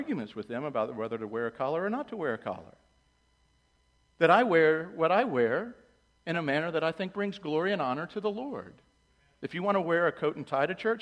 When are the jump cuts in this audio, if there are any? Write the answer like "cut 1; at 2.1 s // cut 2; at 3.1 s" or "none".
none